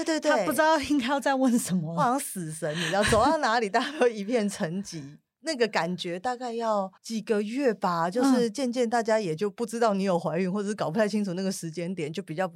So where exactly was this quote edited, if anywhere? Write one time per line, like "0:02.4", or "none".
0:07.0